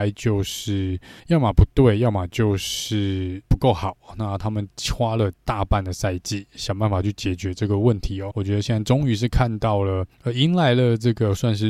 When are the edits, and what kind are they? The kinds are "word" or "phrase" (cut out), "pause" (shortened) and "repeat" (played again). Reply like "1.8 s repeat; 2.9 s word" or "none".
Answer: 1.2 s pause; 3.5 s pause; 5.4 s pause; 8.3 s word; 10.1 s pause